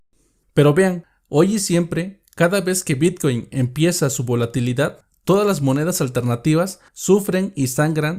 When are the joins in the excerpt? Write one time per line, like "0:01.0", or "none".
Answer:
0:06.9